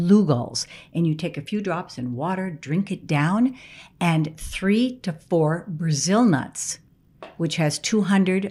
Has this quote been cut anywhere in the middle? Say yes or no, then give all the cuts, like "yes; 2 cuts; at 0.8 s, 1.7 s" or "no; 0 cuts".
no; 0 cuts